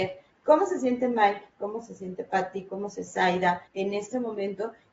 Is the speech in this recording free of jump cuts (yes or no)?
no